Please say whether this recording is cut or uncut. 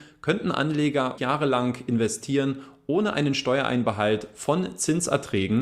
cut